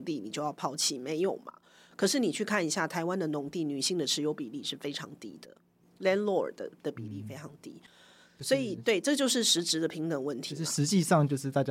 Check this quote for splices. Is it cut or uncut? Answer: uncut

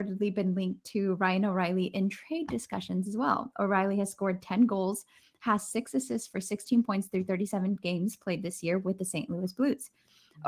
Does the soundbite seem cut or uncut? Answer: uncut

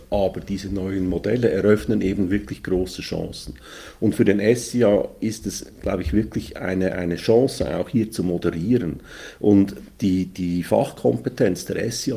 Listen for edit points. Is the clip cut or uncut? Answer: uncut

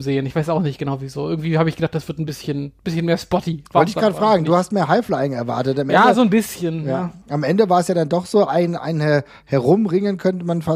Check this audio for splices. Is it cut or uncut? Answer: uncut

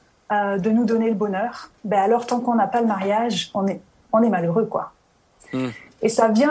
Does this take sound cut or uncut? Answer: cut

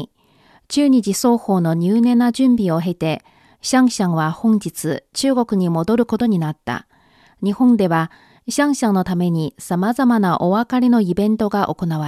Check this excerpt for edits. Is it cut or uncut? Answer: uncut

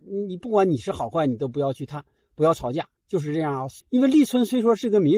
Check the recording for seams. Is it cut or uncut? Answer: cut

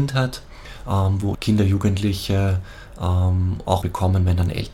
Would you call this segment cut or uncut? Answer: cut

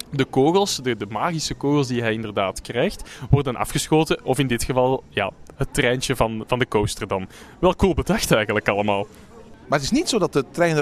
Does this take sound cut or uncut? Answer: uncut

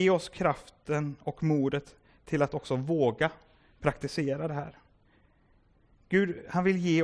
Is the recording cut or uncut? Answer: uncut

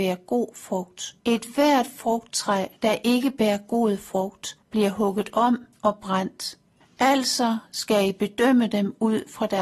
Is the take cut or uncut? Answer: cut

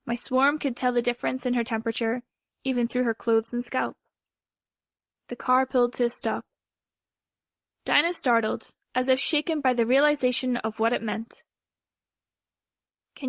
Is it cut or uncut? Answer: uncut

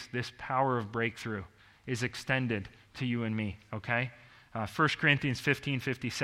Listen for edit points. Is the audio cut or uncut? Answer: uncut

